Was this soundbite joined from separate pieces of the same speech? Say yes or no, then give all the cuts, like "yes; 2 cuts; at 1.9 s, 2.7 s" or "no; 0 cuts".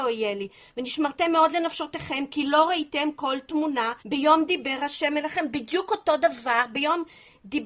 yes; 1 cut; at 4.0 s